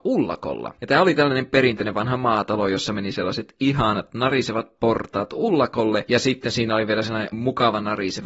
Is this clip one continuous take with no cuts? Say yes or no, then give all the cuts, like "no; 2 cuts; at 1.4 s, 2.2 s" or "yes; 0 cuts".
no; 1 cut; at 7.3 s